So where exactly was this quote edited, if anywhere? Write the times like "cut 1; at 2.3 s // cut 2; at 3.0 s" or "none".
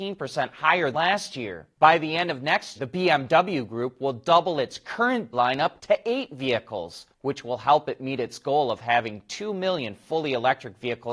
cut 1; at 0.9 s // cut 2; at 1.7 s // cut 3; at 2.8 s // cut 4; at 5.3 s // cut 5; at 5.8 s // cut 6; at 7.1 s